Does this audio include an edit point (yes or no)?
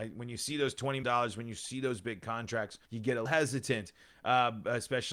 yes